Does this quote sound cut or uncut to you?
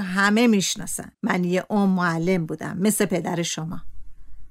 cut